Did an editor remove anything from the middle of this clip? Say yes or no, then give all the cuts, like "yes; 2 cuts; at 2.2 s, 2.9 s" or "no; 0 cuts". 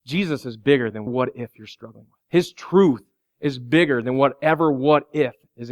yes; 2 cuts; at 1.1 s, 2.2 s